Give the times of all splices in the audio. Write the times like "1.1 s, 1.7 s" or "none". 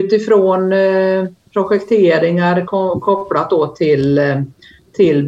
none